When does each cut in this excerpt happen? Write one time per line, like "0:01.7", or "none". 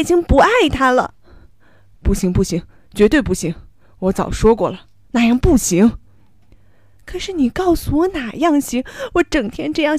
none